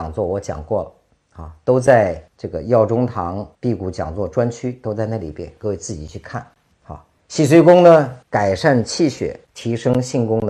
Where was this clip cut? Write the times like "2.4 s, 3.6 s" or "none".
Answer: 2.3 s, 3.5 s, 7.2 s, 8.2 s, 9.4 s